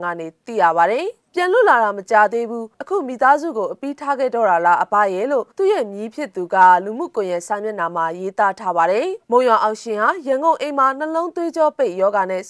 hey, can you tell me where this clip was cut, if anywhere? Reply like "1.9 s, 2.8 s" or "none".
1.3 s, 2.7 s, 5.5 s, 9.2 s

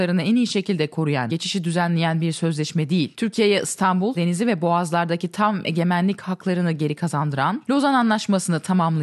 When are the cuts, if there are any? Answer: 1.3 s, 4.1 s

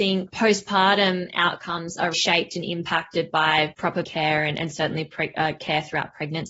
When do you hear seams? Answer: 2.1 s, 4.0 s

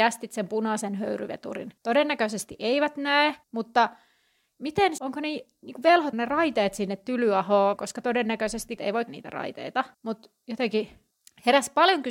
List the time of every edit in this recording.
1.8 s, 3.4 s, 5.0 s, 6.1 s, 7.8 s, 8.8 s, 9.1 s, 9.9 s

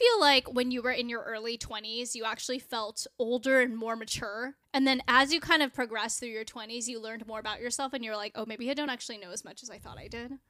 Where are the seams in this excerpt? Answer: none

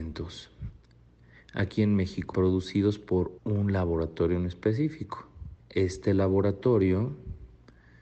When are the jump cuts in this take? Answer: 2.3 s, 3.4 s, 5.6 s

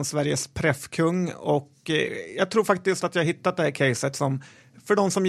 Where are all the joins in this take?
none

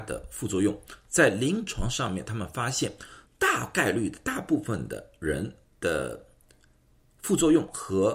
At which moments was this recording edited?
3.3 s, 5.6 s

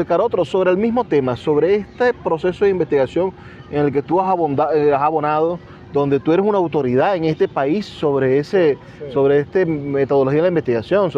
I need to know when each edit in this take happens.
none

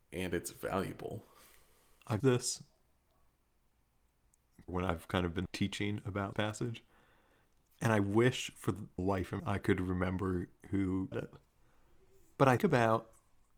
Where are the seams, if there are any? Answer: 2.2 s, 4.7 s, 5.5 s, 6.3 s, 9.0 s, 9.4 s, 11.1 s, 12.6 s

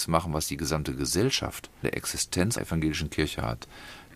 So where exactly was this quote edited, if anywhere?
1.8 s, 2.6 s

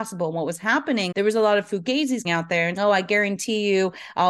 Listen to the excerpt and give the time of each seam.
1.1 s, 2.2 s, 2.8 s

